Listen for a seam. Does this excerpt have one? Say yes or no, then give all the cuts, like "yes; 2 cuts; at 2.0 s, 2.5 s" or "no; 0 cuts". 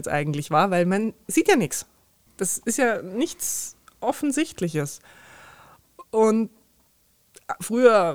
no; 0 cuts